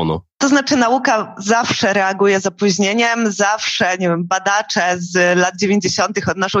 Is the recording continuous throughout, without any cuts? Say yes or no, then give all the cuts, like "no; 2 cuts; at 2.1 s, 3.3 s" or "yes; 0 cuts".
yes; 0 cuts